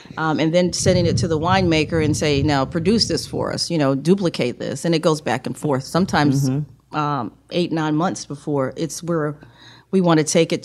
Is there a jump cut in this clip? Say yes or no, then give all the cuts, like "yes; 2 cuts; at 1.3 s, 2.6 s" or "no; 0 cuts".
no; 0 cuts